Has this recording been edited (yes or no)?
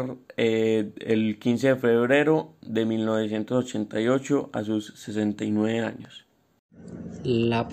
no